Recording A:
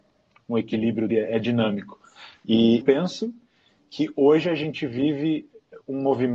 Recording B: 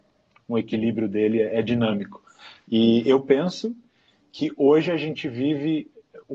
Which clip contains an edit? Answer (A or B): A